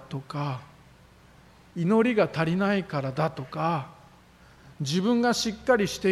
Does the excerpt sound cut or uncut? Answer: uncut